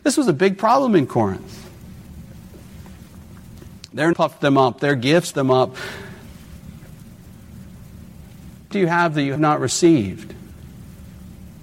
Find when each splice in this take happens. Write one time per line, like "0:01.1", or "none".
0:04.1
0:05.3
0:08.7
0:09.4